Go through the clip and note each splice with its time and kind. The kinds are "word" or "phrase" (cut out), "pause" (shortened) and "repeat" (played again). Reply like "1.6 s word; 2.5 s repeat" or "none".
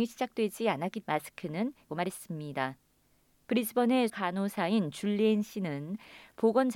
1.0 s word; 1.9 s word; 4.1 s word